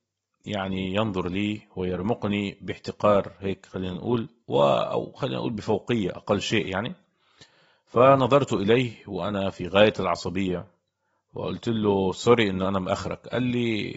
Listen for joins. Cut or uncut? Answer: uncut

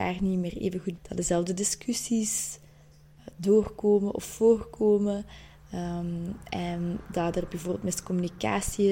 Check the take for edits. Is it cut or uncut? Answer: cut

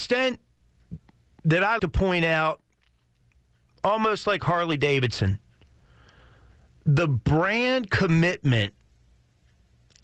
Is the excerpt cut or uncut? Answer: cut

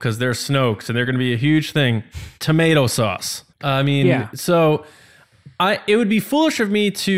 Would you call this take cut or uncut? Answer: cut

